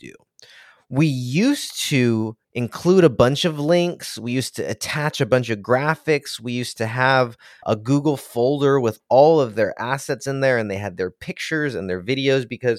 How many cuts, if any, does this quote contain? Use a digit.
1